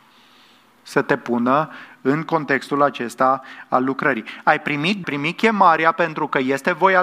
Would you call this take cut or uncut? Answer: cut